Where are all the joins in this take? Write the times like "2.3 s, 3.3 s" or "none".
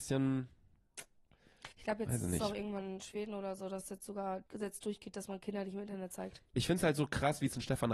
1.7 s, 4.5 s, 6.5 s